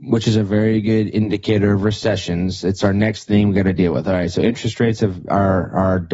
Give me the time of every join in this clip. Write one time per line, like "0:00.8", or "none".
none